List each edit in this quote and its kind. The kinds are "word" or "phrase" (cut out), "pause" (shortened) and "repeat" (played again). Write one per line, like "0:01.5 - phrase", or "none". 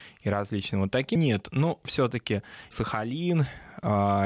0:01.2 - word
0:02.7 - word

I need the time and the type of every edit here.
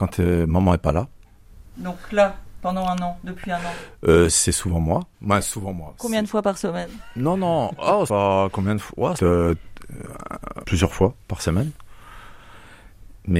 0:05.1 - pause
0:08.1 - word
0:09.2 - phrase
0:10.6 - word

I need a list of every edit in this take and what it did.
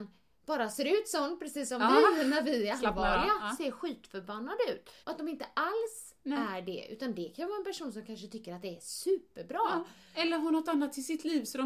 0:05.0 - pause

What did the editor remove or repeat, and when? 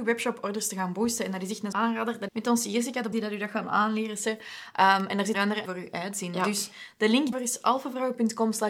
0:01.7 - word
0:02.3 - word
0:03.1 - word
0:05.3 - word
0:05.7 - word
0:07.3 - word

